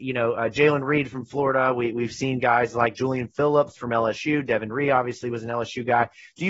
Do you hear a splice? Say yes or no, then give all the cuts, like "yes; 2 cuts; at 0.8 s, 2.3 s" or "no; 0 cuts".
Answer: no; 0 cuts